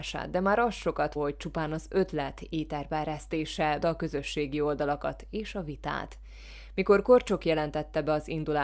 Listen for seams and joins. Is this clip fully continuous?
no; 2 cuts; at 1.2 s, 3.8 s

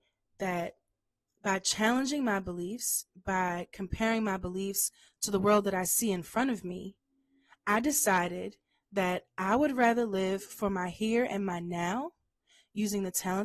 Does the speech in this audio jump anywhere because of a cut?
no; 0 cuts

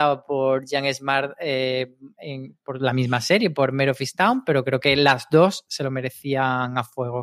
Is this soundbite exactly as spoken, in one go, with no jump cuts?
yes; 0 cuts

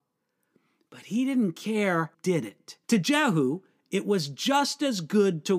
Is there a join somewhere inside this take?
yes; 2 cuts; at 2.1 s, 2.8 s

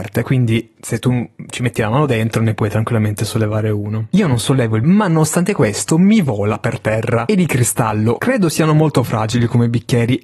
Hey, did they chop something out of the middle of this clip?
yes; 1 cut; at 4.8 s

